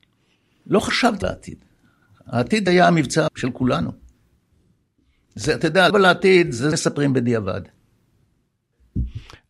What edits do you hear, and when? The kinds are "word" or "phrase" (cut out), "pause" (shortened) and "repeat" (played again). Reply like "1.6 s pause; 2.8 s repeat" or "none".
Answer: 1.2 s word; 2.7 s word; 3.3 s word; 5.9 s word; 6.7 s word